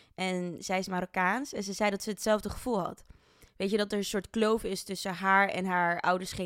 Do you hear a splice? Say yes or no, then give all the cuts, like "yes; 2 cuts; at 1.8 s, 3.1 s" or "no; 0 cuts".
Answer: no; 0 cuts